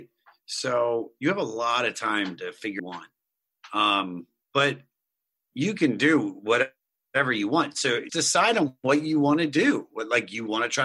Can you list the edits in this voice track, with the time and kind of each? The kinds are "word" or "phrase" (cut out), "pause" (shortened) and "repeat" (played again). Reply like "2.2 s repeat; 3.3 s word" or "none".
2.8 s phrase; 4.4 s pause; 8.1 s word

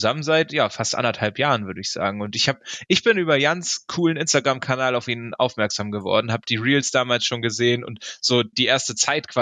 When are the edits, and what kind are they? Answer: none

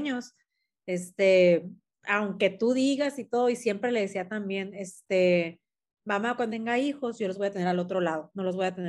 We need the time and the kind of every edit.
6.5 s word

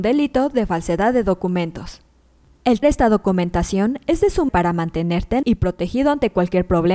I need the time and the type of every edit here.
2.8 s word; 4.5 s word; 5.4 s word

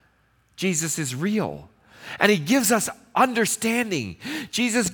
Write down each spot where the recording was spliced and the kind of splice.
none

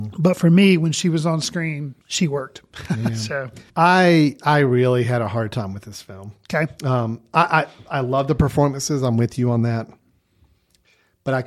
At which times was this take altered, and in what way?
2.0 s pause; 3.7 s pause

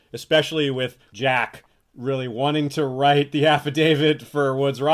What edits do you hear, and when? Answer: none

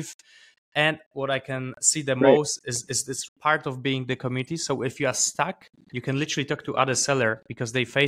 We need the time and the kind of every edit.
2.6 s word; 3.3 s word

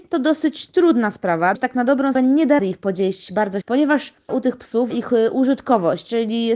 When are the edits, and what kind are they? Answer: 1.5 s word; 2.1 s word; 2.6 s word; 3.6 s word; 4.3 s word; 4.9 s word

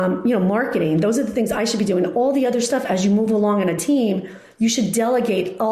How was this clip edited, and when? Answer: none

